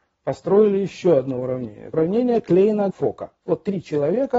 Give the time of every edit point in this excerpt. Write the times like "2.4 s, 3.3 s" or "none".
1.9 s, 2.9 s